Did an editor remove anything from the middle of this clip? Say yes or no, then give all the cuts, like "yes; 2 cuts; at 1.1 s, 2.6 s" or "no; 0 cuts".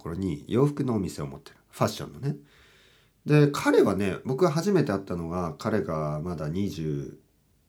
no; 0 cuts